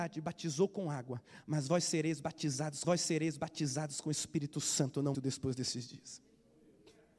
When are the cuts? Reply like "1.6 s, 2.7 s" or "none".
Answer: 2.8 s, 5.1 s